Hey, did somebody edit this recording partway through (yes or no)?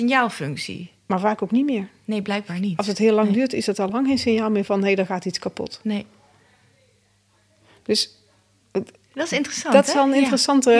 no